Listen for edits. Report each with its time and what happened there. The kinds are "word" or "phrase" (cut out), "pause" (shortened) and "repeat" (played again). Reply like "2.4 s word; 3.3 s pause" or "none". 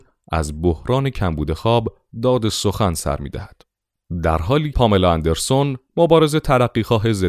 4.7 s word